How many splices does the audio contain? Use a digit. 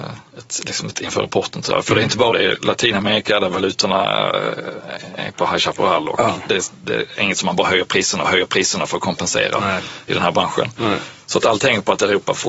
3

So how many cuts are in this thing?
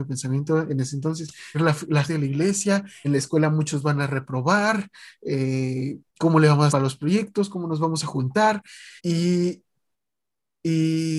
6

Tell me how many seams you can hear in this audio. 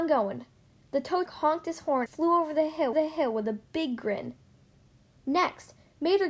3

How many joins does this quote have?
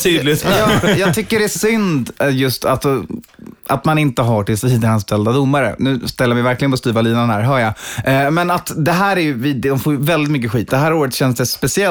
1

